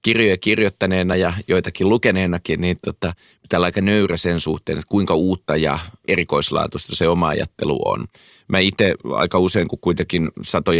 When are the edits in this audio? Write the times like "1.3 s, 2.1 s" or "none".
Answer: none